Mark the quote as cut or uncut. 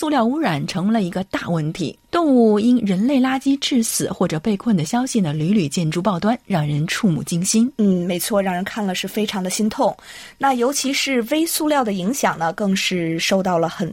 cut